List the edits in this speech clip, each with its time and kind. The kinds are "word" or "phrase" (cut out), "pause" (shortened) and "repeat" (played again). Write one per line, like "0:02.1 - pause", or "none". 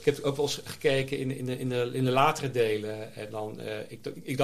none